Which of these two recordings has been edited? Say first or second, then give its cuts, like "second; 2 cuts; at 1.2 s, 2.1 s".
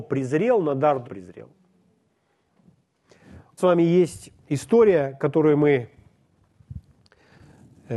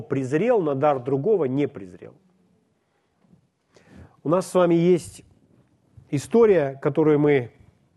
first; 3 cuts; at 1.0 s, 3.6 s, 4.4 s